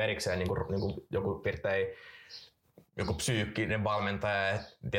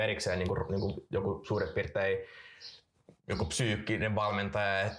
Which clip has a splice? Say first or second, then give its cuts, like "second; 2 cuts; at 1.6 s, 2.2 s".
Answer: first; 1 cut; at 1.4 s